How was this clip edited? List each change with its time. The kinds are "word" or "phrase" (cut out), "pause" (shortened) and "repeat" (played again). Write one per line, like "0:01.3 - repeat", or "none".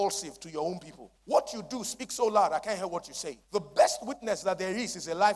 0:01.2 - pause
0:03.4 - pause